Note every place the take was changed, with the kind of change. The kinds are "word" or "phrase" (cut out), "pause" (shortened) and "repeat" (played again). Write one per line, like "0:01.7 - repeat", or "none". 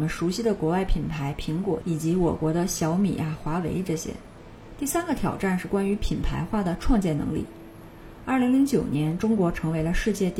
0:01.8 - phrase